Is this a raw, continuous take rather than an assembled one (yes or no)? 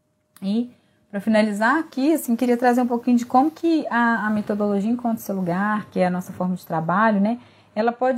yes